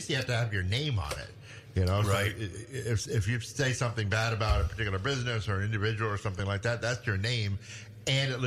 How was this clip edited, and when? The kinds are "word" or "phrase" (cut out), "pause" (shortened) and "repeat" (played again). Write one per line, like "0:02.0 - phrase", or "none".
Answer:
none